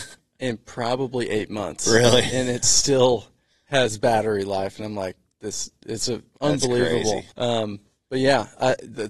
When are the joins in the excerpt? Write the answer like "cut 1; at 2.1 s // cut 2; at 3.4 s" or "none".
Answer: cut 1; at 7.3 s

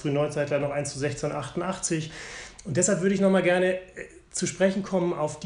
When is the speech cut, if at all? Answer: none

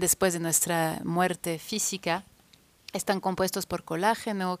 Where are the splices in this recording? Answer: none

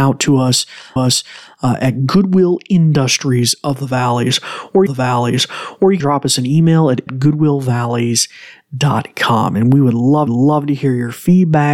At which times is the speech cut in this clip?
cut 1; at 1.0 s // cut 2; at 4.9 s // cut 3; at 6.0 s // cut 4; at 7.1 s // cut 5; at 10.3 s

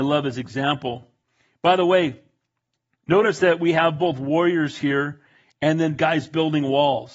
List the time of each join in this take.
none

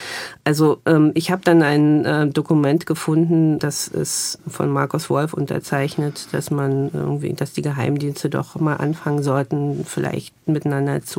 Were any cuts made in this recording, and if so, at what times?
none

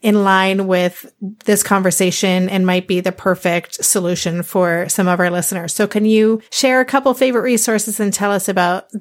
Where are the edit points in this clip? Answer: cut 1; at 6.5 s

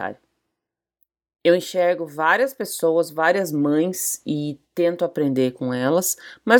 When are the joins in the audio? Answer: none

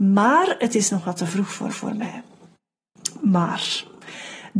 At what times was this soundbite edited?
cut 1; at 1.7 s

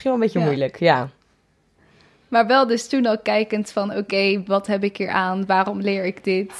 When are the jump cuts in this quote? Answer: none

